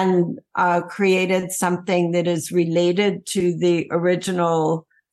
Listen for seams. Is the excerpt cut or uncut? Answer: uncut